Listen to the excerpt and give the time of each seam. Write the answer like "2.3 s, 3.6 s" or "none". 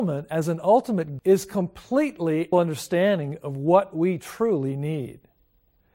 1.2 s, 2.5 s

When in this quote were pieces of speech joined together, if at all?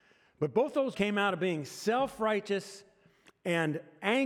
0.9 s

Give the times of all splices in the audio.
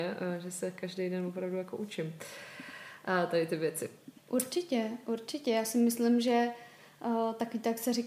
4.2 s

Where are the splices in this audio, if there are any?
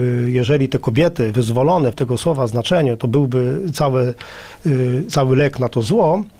1.9 s

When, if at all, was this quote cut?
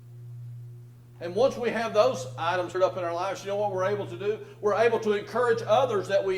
2.7 s

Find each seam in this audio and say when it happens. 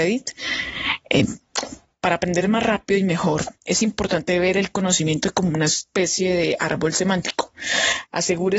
3.6 s

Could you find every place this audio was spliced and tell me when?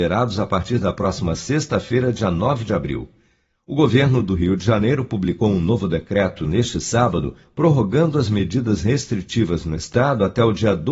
none

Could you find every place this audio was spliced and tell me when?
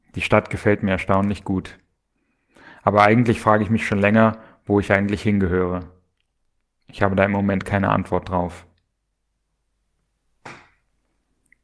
none

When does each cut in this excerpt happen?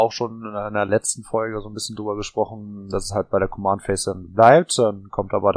none

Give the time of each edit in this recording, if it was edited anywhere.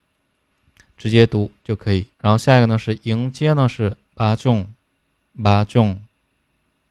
2.1 s, 4.1 s

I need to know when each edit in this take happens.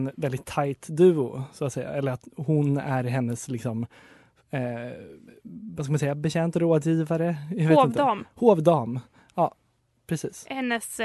none

